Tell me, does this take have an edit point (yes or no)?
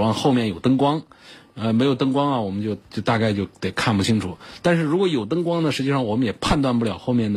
yes